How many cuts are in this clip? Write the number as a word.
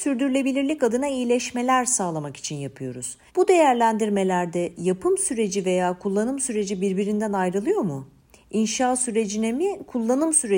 one